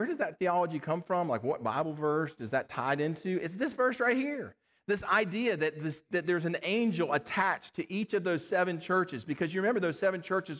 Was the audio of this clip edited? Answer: no; 0 cuts

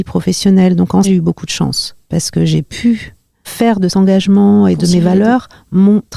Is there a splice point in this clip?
yes; 3 cuts; at 1.0 s, 3.4 s, 3.9 s

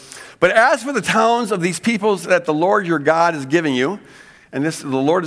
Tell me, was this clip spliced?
no; 0 cuts

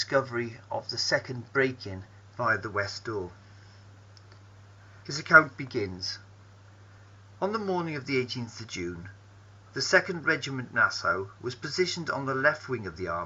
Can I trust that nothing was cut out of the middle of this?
yes; 0 cuts

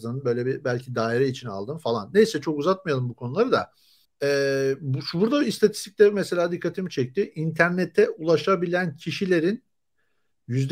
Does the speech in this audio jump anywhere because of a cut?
yes; 1 cut; at 4.0 s

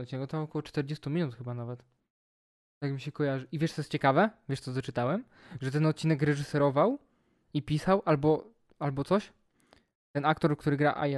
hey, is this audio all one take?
yes; 0 cuts

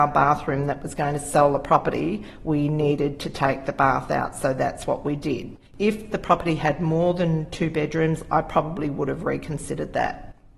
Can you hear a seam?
yes; 1 cut; at 5.7 s

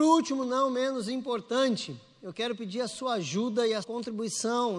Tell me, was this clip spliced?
yes; 1 cut; at 3.8 s

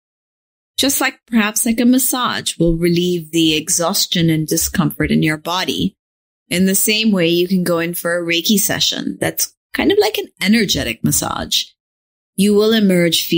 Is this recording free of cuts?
yes; 0 cuts

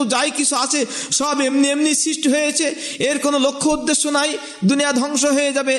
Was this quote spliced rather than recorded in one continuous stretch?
no; 0 cuts

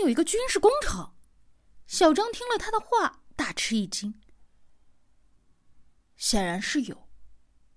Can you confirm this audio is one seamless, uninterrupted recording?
no; 1 cut; at 1.3 s

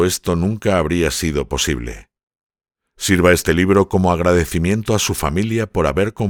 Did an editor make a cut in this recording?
no; 0 cuts

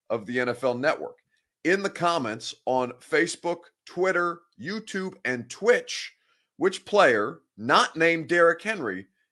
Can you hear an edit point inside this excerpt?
no; 0 cuts

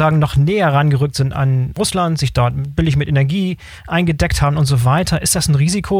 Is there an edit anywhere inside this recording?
no; 0 cuts

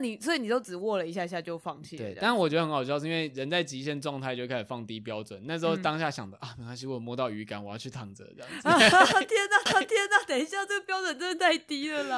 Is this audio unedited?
no; 1 cut; at 9.7 s

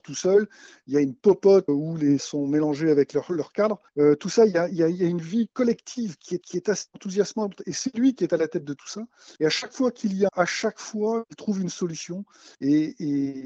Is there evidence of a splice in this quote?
yes; 7 cuts; at 1.7 s, 2.2 s, 3.9 s, 6.4 s, 9.4 s, 10.3 s, 12.5 s

